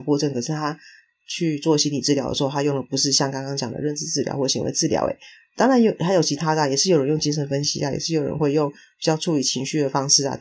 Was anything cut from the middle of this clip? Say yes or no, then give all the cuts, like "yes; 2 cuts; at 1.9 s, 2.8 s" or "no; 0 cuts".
no; 0 cuts